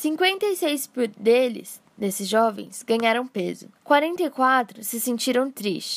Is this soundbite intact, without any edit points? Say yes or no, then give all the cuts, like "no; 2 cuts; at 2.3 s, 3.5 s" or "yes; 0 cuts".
no; 1 cut; at 3.8 s